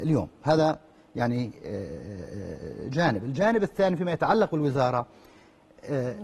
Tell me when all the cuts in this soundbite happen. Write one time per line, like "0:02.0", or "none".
none